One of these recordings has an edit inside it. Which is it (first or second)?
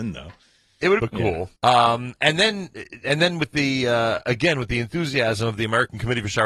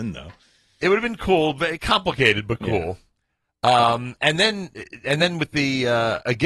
first